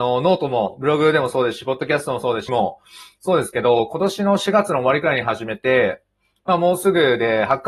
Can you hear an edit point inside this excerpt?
yes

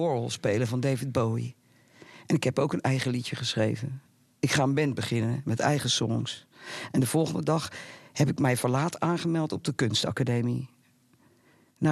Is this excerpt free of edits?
yes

